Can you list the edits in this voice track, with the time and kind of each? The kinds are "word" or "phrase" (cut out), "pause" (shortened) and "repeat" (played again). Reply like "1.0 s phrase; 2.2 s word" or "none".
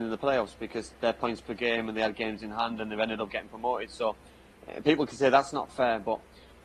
none